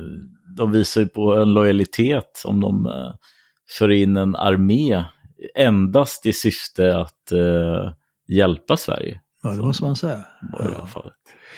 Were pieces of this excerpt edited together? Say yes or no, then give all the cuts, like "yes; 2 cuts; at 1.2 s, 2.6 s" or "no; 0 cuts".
no; 0 cuts